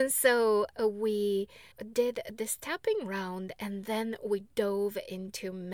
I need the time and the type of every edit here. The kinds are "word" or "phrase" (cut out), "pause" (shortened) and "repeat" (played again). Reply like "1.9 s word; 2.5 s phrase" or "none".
1.7 s pause